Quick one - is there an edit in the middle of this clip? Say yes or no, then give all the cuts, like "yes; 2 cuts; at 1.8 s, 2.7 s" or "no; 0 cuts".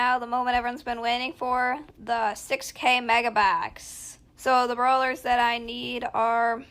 yes; 1 cut; at 4.3 s